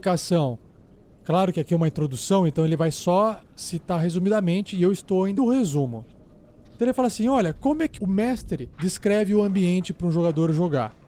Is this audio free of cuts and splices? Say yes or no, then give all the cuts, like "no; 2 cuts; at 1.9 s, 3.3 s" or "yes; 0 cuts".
no; 3 cuts; at 5.4 s, 8.0 s, 8.7 s